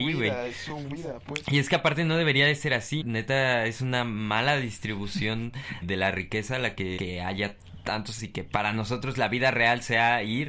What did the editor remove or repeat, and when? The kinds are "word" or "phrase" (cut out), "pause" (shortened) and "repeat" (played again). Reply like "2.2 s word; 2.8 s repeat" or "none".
3.0 s word; 5.8 s word; 7.0 s word; 8.2 s word